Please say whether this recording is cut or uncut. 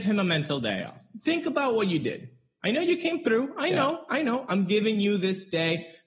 uncut